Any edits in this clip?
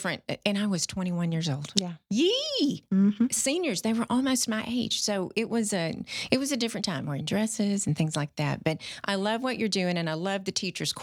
no; 0 cuts

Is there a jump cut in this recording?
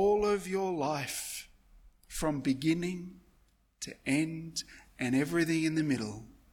no; 0 cuts

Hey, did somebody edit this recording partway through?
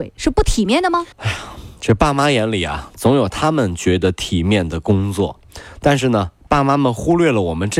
yes; 1 cut; at 1.1 s

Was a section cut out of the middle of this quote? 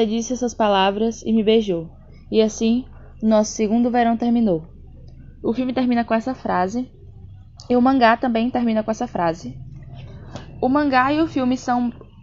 no; 0 cuts

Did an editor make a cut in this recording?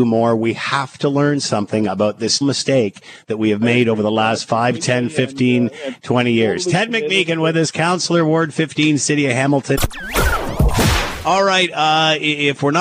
yes; 1 cut; at 2.4 s

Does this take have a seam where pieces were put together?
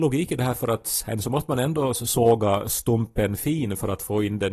no; 0 cuts

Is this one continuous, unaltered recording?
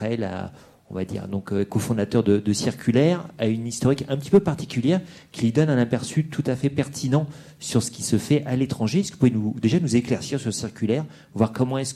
yes; 0 cuts

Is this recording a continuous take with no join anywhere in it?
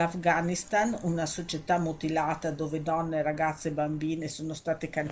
yes; 0 cuts

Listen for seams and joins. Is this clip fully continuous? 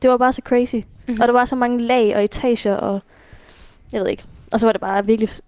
yes; 0 cuts

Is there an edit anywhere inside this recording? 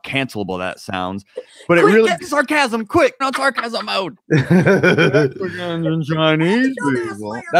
yes; 2 cuts; at 2.2 s, 3.2 s

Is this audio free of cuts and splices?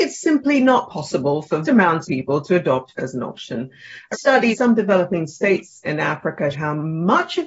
no; 7 cuts; at 1.6 s, 2.1 s, 3.0 s, 4.1 s, 4.5 s, 5.8 s, 6.5 s

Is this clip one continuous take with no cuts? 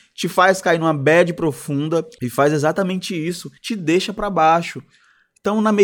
no; 1 cut; at 3.6 s

